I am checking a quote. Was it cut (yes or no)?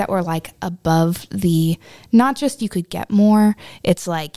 no